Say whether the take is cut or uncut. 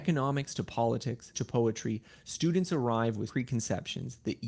cut